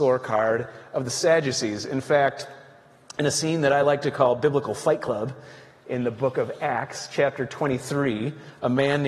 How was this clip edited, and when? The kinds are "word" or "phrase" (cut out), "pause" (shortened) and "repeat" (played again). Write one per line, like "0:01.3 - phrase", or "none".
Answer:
none